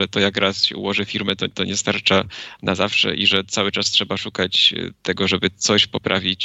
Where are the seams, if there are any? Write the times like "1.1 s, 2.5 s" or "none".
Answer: 4.9 s